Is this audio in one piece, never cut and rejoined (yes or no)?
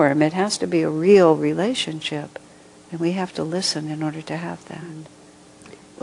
yes